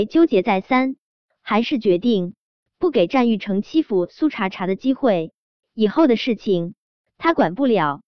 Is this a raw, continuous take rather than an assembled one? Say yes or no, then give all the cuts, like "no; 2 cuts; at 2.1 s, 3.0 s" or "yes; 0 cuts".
yes; 0 cuts